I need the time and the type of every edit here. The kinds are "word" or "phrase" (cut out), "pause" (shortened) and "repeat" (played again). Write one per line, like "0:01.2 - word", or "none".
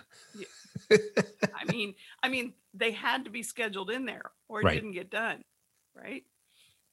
none